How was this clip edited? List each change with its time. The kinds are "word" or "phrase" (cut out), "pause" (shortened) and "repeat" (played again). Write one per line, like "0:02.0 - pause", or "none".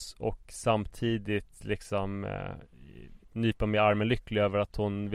0:03.2 - pause